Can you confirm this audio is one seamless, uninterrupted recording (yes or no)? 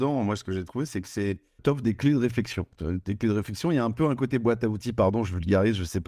no